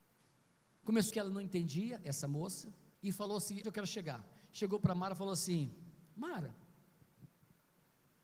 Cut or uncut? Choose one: cut